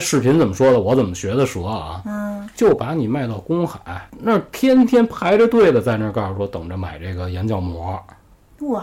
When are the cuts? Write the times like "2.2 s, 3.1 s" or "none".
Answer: 4.1 s